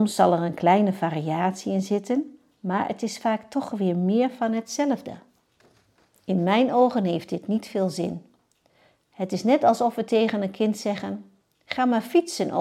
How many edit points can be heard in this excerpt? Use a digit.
0